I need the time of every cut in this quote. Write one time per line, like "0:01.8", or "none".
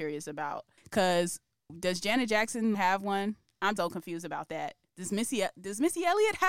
0:02.7
0:03.8
0:04.9